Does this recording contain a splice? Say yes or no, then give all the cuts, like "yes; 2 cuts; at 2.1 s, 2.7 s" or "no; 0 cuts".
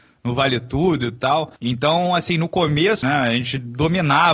yes; 2 cuts; at 1.6 s, 3.0 s